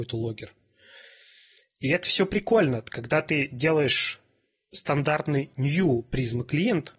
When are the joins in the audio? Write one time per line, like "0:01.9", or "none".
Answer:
none